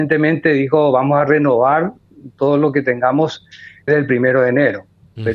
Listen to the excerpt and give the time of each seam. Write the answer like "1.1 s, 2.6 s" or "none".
3.9 s